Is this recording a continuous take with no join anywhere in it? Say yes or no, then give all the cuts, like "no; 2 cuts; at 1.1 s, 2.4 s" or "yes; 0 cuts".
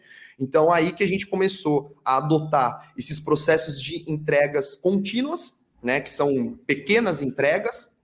yes; 0 cuts